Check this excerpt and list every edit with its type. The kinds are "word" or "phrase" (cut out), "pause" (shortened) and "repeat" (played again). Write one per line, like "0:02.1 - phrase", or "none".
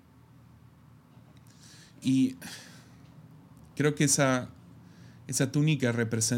none